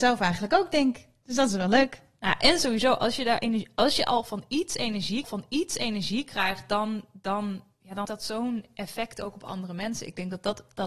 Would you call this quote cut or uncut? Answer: cut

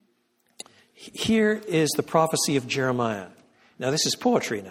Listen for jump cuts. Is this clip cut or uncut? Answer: uncut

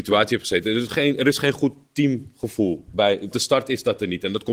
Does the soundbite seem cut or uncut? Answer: cut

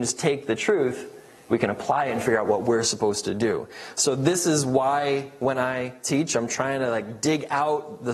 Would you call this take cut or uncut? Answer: uncut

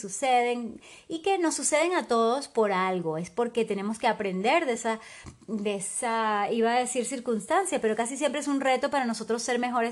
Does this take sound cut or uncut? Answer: uncut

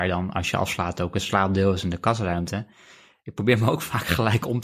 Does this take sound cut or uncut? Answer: uncut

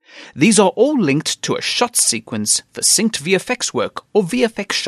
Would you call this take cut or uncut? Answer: uncut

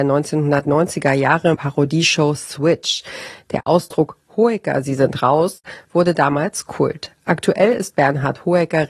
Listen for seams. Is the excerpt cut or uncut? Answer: cut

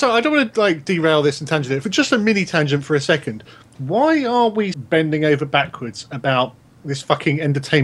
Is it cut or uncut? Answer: cut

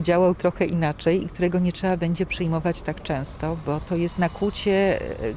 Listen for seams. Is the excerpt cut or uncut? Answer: uncut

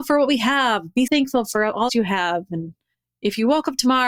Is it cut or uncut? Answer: cut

